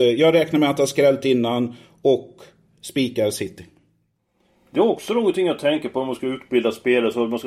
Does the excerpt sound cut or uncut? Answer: uncut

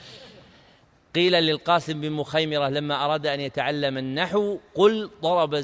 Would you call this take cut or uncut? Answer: uncut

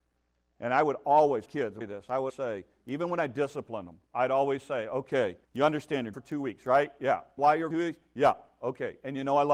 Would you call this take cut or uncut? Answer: cut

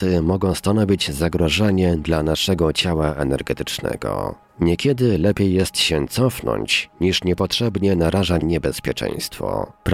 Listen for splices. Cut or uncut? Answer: cut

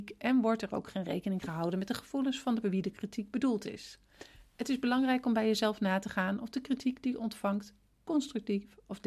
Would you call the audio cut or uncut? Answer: cut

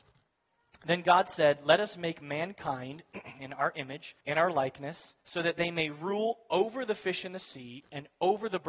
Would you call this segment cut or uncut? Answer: cut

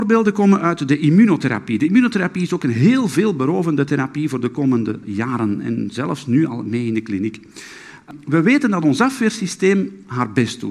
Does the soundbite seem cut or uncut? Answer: uncut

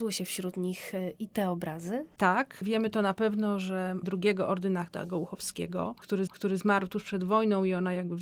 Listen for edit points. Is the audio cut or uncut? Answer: cut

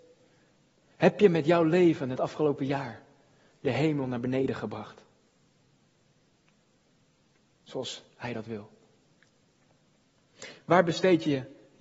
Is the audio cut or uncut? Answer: uncut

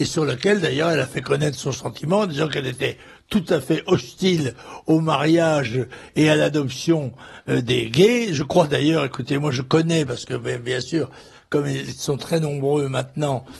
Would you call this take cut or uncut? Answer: uncut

